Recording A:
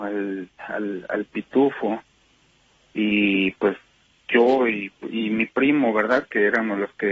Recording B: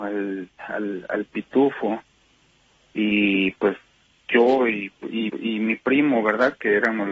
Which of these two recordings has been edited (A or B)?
B